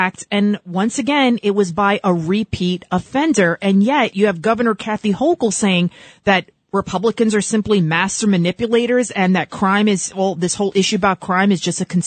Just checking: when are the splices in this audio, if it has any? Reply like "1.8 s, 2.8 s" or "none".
none